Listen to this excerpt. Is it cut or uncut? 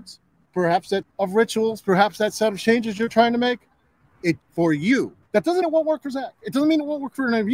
cut